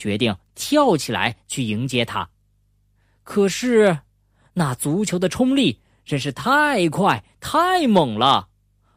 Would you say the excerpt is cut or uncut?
uncut